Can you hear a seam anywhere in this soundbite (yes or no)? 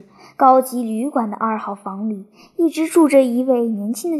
no